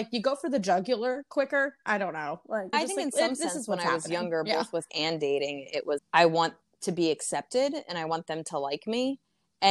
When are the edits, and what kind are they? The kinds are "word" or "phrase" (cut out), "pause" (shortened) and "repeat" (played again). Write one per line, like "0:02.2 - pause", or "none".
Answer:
0:02.7 - word
0:04.9 - word
0:06.0 - word